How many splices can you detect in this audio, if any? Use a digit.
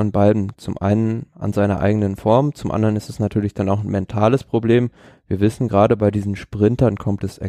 0